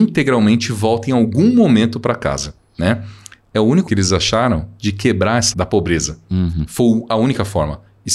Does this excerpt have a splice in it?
yes; 2 cuts; at 3.9 s, 5.5 s

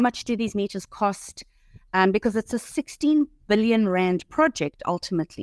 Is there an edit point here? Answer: no; 0 cuts

